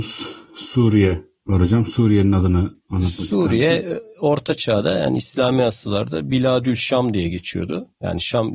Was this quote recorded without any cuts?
yes; 0 cuts

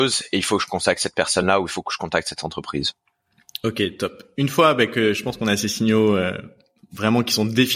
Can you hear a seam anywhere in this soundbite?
no; 0 cuts

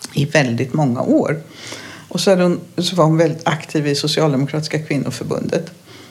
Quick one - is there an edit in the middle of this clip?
no; 0 cuts

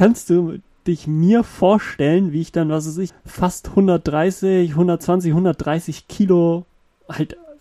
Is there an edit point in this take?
yes; 1 cut; at 3.1 s

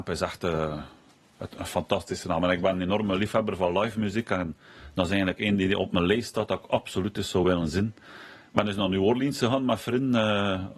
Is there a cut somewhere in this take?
no; 0 cuts

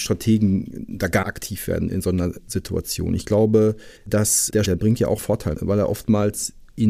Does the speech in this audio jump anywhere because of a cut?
yes; 5 cuts; at 1.2 s, 4.0 s, 4.6 s, 5.2 s, 5.5 s

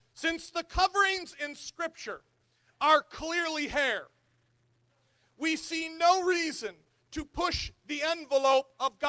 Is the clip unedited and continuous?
yes; 0 cuts

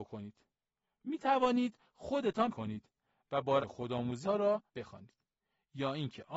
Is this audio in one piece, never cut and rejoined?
no; 4 cuts; at 2.5 s, 3.6 s, 4.2 s, 4.7 s

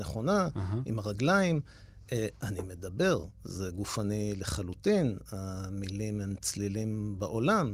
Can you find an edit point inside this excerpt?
no; 0 cuts

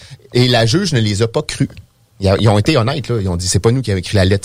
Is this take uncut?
yes; 0 cuts

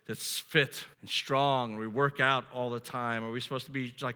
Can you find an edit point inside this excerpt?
yes; 1 cut; at 0.9 s

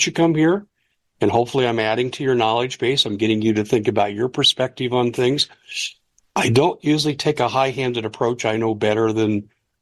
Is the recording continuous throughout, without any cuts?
yes; 0 cuts

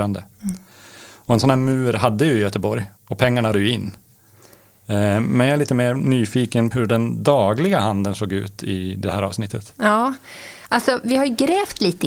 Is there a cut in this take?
yes; 3 cuts; at 3.0 s, 3.5 s, 6.7 s

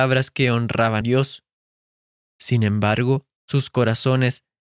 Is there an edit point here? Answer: yes; 2 cuts; at 1.0 s, 3.4 s

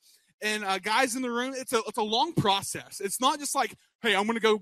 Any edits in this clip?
no; 0 cuts

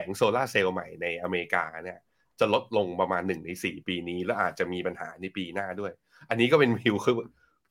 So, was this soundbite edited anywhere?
no; 0 cuts

